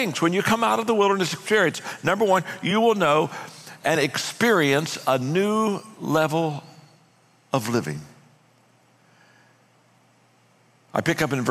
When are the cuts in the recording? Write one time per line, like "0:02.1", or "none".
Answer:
none